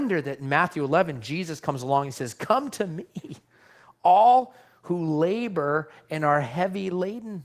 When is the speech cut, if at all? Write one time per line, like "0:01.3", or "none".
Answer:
none